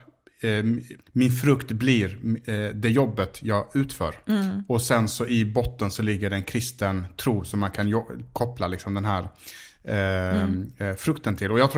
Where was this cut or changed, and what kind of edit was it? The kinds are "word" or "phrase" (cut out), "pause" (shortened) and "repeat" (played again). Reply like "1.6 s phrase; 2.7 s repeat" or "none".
1.0 s pause